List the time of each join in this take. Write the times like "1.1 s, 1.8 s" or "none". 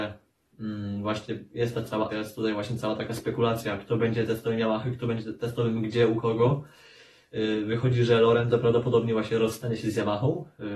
2.1 s